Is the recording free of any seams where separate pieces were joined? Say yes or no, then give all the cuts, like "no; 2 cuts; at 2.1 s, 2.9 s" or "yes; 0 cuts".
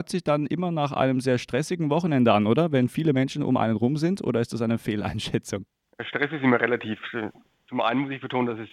yes; 0 cuts